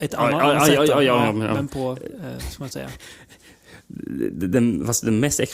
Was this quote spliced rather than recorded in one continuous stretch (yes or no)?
no